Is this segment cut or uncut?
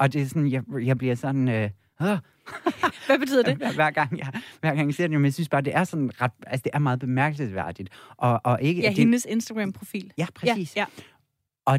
uncut